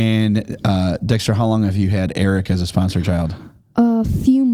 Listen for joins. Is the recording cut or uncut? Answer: uncut